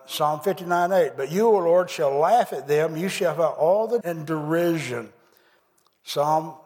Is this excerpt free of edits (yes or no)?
no